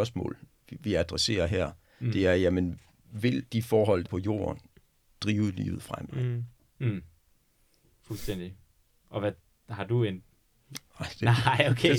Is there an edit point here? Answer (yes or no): yes